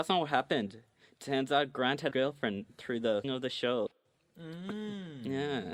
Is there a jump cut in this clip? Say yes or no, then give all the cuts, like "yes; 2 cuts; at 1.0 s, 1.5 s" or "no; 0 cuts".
yes; 2 cuts; at 2.1 s, 3.2 s